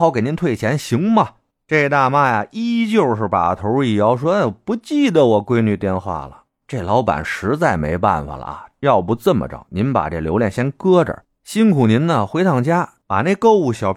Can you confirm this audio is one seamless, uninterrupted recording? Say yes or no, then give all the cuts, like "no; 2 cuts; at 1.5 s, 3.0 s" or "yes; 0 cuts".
yes; 0 cuts